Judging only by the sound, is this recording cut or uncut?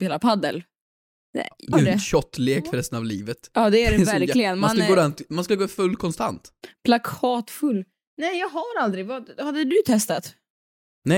cut